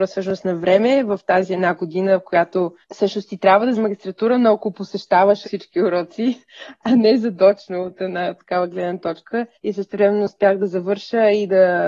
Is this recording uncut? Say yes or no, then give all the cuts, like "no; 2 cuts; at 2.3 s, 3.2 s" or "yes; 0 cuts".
no; 4 cuts; at 2.8 s, 3.7 s, 5.4 s, 9.5 s